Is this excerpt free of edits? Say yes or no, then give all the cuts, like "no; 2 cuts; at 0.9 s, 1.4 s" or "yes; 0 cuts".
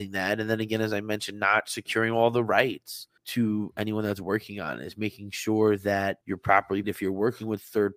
no; 3 cuts; at 3.2 s, 6.2 s, 6.8 s